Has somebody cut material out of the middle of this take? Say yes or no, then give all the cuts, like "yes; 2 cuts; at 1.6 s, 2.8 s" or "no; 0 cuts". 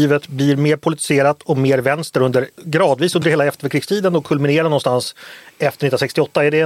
no; 0 cuts